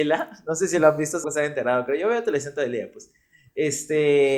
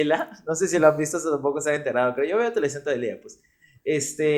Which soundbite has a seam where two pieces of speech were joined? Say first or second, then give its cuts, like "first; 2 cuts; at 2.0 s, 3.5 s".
first; 1 cut; at 1.2 s